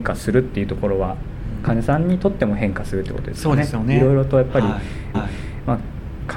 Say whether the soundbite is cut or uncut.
cut